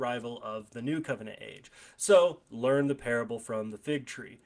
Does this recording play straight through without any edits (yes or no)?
yes